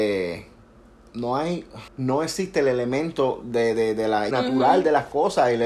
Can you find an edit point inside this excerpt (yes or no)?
yes